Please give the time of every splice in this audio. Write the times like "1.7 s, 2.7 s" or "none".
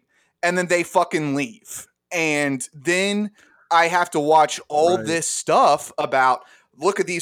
none